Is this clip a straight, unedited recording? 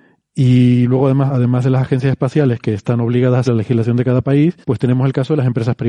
no; 3 cuts; at 1.3 s, 3.4 s, 4.6 s

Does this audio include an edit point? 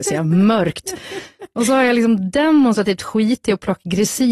no; 0 cuts

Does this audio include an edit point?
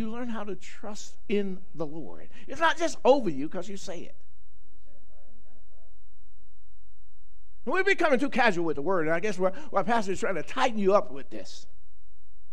no; 0 cuts

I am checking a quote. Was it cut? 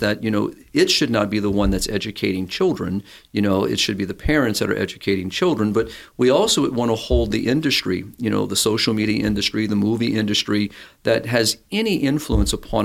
no; 0 cuts

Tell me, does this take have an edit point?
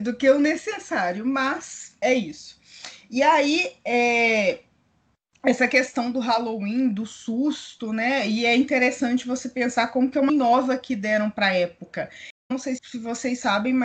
yes; 4 cuts; at 2.0 s, 10.3 s, 12.4 s, 12.8 s

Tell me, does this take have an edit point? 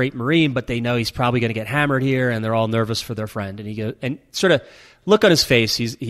no; 0 cuts

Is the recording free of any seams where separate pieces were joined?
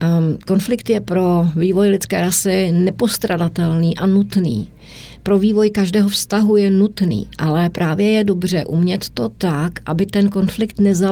yes; 0 cuts

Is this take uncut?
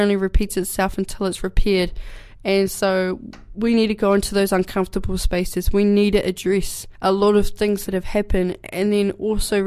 no; 1 cut; at 6.9 s

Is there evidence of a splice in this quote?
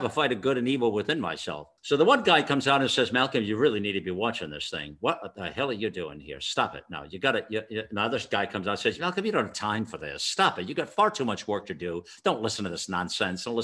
yes; 1 cut; at 1.8 s

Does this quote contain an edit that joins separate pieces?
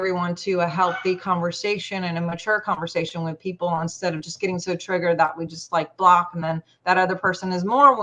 no; 0 cuts

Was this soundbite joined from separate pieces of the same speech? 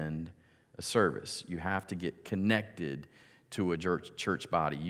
no; 0 cuts

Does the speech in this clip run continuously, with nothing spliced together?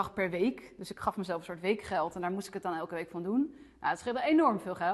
yes; 0 cuts

